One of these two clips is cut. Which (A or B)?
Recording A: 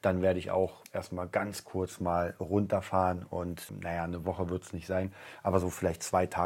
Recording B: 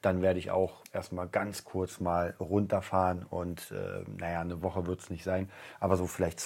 A